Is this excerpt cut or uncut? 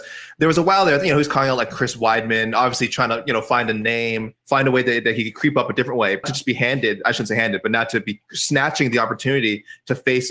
cut